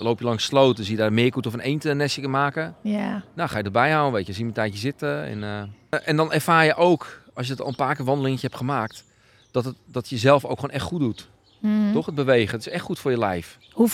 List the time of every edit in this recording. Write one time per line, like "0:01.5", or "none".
none